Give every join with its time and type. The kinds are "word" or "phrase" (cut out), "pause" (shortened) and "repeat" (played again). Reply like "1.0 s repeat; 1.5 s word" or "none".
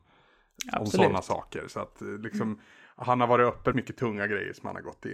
3.7 s phrase